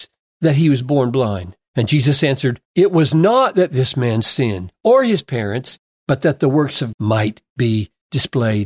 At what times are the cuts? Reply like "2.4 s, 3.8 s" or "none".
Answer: 2.6 s, 6.9 s

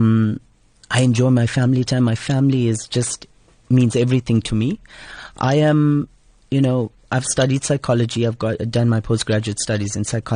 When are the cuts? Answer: none

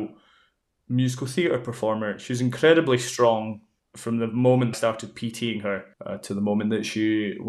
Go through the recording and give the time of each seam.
3.8 s, 4.7 s, 5.9 s

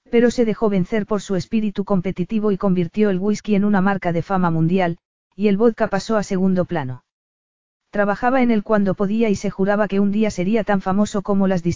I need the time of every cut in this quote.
none

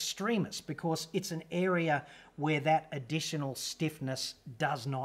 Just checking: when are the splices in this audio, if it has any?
none

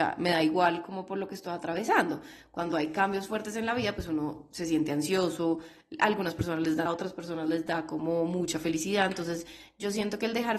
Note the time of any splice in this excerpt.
6.9 s

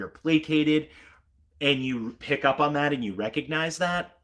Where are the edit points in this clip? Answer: none

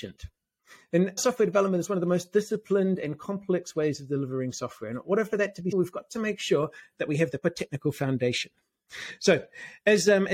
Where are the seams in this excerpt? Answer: 1.2 s, 5.7 s, 7.4 s

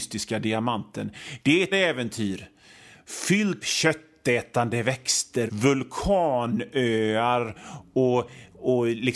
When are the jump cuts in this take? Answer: 1.7 s, 3.6 s, 5.5 s

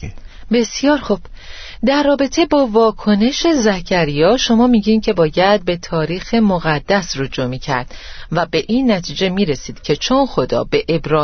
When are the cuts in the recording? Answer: none

